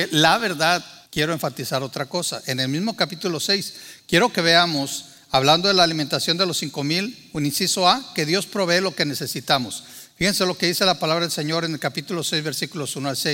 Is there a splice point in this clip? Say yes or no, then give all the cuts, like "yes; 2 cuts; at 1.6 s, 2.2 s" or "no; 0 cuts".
yes; 1 cut; at 1.1 s